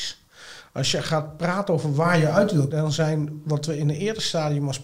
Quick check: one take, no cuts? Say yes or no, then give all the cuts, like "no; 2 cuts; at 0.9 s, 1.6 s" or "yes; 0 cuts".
no; 1 cut; at 2.7 s